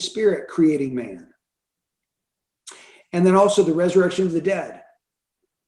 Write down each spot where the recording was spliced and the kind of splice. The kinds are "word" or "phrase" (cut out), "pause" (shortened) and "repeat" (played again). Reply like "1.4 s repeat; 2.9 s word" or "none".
none